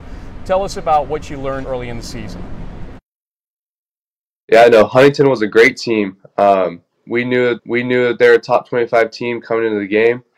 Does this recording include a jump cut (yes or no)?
yes